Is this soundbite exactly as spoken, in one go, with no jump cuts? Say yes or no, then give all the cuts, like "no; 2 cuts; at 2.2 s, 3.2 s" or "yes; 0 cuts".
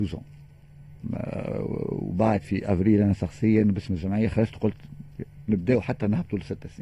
yes; 0 cuts